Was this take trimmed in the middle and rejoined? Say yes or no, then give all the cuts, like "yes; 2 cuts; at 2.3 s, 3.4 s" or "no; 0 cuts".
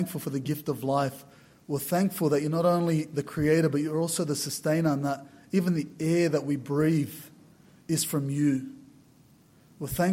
no; 0 cuts